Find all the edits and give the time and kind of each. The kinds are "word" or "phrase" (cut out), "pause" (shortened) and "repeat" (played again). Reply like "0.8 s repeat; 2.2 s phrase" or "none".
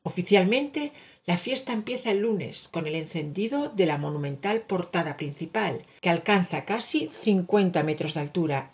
none